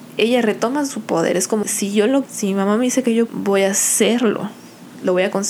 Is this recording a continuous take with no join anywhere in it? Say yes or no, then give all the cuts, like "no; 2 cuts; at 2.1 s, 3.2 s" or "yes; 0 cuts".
no; 3 cuts; at 1.6 s, 2.3 s, 3.3 s